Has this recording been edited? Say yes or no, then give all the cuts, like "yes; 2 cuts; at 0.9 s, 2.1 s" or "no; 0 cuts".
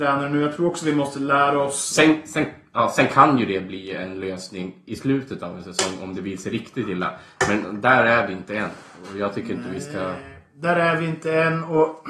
no; 0 cuts